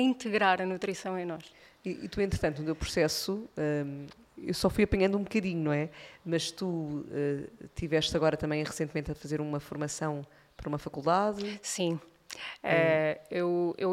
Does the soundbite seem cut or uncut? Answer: uncut